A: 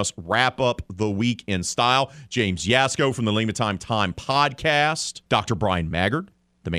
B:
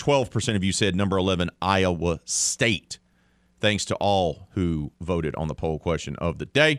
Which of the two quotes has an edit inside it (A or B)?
A